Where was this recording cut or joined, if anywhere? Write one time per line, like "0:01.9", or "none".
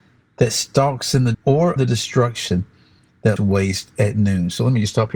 0:01.3
0:01.8
0:03.4